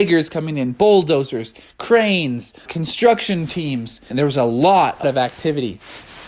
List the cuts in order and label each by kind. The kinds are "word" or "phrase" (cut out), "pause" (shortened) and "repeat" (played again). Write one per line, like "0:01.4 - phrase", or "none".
0:02.7 - word
0:04.1 - word
0:05.0 - word